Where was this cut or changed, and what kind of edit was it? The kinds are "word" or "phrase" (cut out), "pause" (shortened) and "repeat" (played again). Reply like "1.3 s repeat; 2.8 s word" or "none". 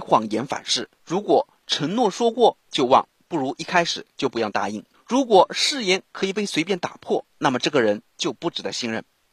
0.9 s pause; 4.9 s pause; 7.3 s pause